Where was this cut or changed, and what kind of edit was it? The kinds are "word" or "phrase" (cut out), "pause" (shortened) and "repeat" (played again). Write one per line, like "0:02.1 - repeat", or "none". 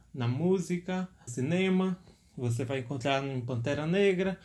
0:01.3 - word